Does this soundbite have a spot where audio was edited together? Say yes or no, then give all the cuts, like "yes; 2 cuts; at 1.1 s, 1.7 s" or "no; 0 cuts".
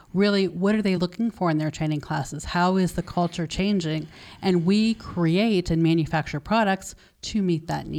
no; 0 cuts